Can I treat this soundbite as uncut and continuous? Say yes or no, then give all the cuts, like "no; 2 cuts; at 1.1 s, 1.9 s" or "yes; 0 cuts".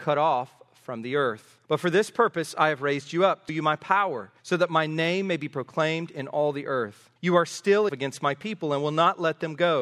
no; 5 cuts; at 1.6 s, 3.5 s, 4.4 s, 7.2 s, 7.9 s